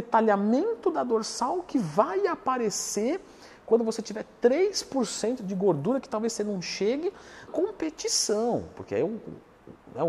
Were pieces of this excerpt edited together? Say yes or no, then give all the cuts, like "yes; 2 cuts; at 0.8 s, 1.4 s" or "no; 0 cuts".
yes; 1 cut; at 7.5 s